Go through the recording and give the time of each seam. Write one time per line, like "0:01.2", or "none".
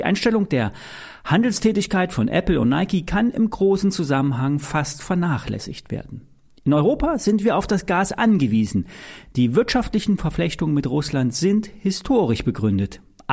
none